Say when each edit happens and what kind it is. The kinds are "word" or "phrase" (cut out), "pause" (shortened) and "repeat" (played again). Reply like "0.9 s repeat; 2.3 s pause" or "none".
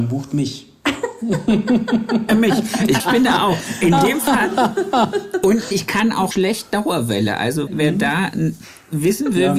2.3 s word; 3.0 s word; 5.7 s word; 6.3 s word; 7.7 s word